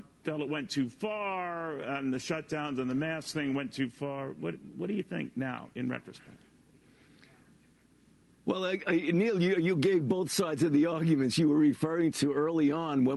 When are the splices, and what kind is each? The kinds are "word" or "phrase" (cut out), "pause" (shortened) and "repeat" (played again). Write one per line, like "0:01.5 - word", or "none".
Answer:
none